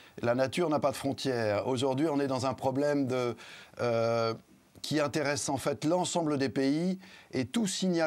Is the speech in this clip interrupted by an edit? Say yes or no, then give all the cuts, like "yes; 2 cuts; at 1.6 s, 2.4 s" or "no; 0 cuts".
no; 0 cuts